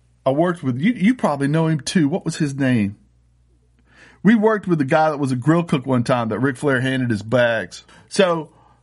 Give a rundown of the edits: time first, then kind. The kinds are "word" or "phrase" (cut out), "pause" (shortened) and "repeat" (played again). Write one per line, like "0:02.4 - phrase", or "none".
none